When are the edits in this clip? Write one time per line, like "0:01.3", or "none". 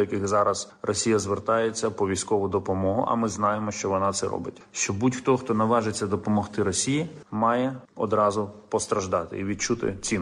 none